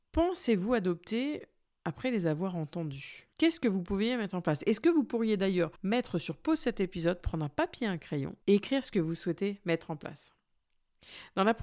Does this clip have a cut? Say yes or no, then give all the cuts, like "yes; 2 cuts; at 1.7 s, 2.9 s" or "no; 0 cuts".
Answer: yes; 3 cuts; at 3.3 s, 5.8 s, 8.4 s